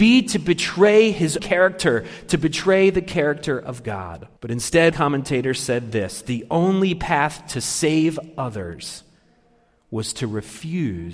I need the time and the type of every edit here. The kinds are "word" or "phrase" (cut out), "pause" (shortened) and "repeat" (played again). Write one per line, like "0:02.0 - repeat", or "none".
0:01.4 - word
0:04.4 - pause
0:04.9 - word

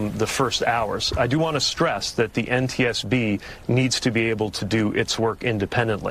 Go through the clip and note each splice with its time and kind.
none

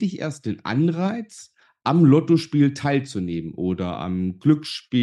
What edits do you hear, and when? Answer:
none

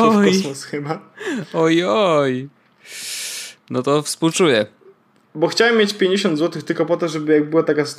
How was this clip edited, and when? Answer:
none

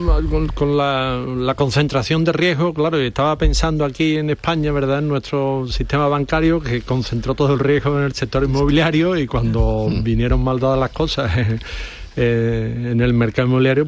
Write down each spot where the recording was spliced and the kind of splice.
none

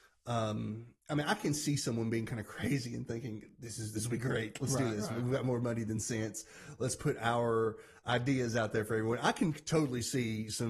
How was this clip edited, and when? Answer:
0:01.0 - pause

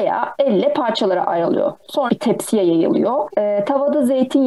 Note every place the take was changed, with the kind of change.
0:02.1 - word

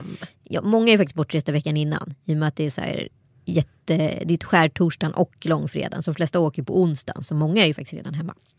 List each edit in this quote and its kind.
none

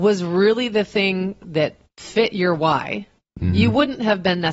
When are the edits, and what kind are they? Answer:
none

